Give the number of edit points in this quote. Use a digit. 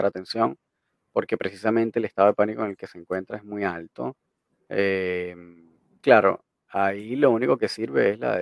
1